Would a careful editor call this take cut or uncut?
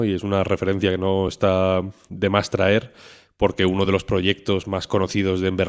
uncut